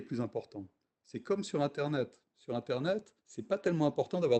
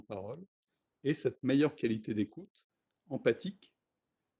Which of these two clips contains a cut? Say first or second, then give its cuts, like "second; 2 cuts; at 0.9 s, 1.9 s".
first; 1 cut; at 3.2 s